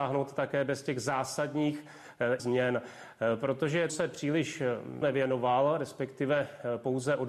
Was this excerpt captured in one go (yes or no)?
no